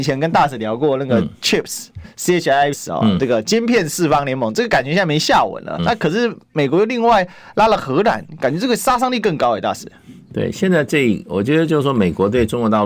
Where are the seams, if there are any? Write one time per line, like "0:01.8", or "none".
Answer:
0:02.0
0:02.7
0:05.8